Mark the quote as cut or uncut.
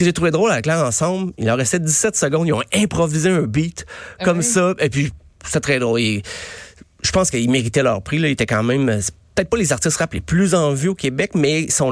uncut